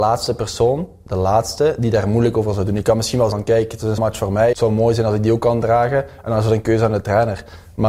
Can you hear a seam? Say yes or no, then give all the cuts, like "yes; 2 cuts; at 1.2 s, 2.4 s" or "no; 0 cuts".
yes; 3 cuts; at 3.3 s, 4.0 s, 4.5 s